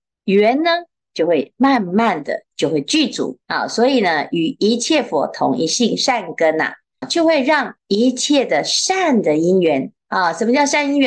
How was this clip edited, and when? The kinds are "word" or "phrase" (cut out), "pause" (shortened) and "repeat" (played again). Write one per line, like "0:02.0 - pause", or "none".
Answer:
0:03.4 - pause
0:07.0 - word
0:07.8 - pause